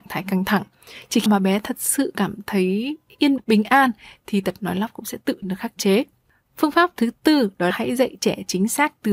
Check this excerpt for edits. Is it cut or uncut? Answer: cut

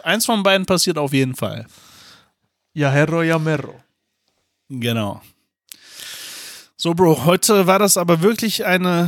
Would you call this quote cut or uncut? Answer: uncut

